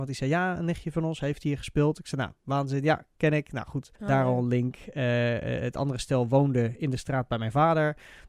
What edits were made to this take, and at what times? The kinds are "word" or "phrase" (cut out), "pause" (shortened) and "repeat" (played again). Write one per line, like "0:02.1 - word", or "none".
0:03.9 - pause